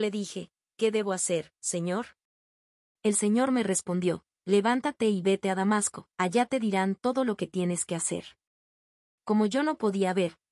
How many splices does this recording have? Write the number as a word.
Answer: one